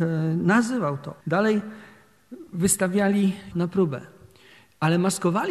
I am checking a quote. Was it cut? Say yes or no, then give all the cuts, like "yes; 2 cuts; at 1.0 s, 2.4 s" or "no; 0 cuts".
yes; 2 cuts; at 1.2 s, 3.5 s